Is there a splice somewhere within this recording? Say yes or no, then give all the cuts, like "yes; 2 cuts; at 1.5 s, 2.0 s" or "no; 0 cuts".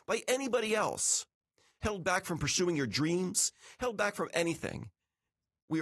no; 0 cuts